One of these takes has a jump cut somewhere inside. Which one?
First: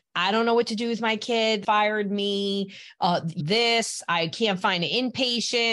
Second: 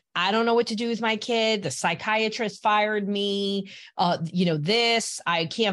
first; 2 cuts; at 1.6 s, 3.4 s

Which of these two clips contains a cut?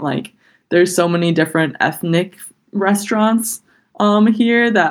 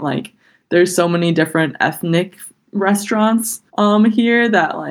second; 1 cut; at 3.7 s

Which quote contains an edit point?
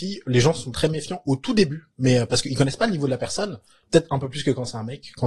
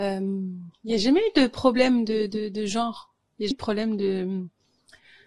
second; 1 cut; at 3.5 s

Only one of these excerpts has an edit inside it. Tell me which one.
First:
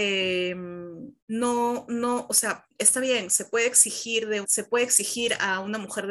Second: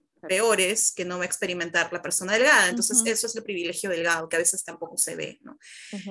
first; 3 cuts; at 1.2 s, 2.7 s, 4.4 s

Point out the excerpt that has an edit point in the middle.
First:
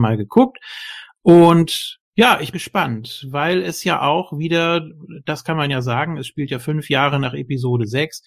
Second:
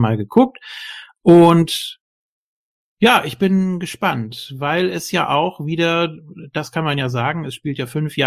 first; 2 cuts; at 2.1 s, 2.5 s

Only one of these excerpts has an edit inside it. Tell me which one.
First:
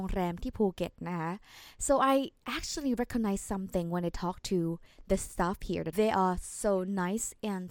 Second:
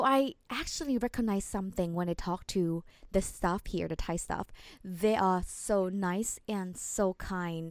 first; 1 cut; at 5.9 s

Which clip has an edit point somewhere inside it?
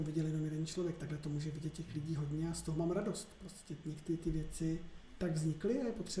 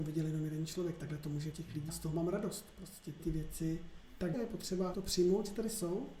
second; 5 cuts; at 1.5 s, 1.9 s, 3.2 s, 4.3 s, 4.9 s

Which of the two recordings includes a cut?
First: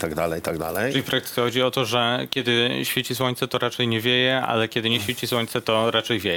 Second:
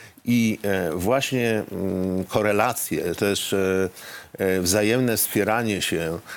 second; 1 cut; at 3.2 s

